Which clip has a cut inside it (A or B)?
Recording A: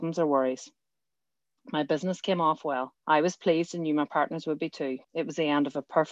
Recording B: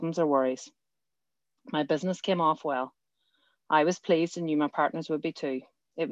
A